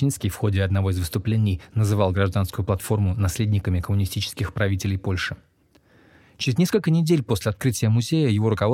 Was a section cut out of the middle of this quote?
no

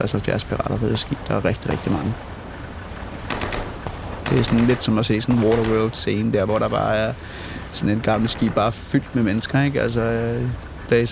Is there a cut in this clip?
no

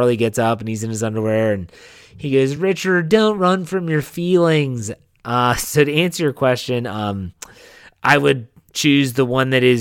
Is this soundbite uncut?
yes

